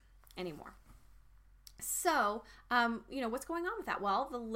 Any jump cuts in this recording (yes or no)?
no